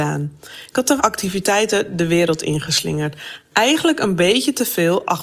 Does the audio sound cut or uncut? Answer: cut